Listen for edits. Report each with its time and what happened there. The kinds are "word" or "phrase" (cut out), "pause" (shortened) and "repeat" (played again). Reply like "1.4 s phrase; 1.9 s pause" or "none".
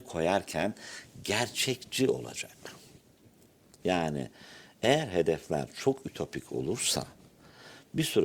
none